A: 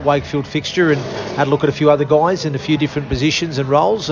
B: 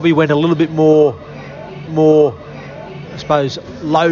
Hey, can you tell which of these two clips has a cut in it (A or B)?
B